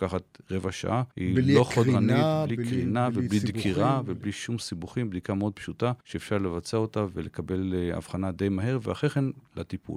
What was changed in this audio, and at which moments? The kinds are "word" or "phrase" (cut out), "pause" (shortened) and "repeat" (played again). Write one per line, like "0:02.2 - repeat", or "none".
0:01.1 - pause
0:06.0 - pause